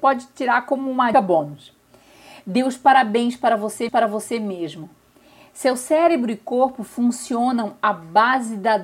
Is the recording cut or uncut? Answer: cut